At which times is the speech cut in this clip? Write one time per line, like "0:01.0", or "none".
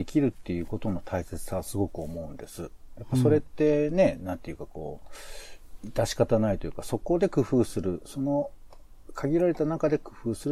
none